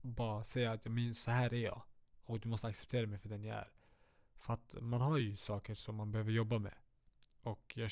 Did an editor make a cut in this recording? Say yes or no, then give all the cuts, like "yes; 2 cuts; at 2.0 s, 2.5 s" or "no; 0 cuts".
no; 0 cuts